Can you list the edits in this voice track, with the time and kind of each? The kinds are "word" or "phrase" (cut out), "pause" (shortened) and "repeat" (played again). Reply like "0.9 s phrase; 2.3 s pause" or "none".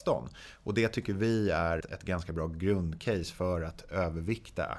1.8 s word